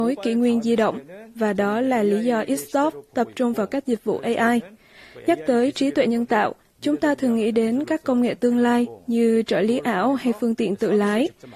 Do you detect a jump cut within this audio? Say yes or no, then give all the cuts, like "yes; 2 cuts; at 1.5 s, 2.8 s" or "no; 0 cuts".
no; 0 cuts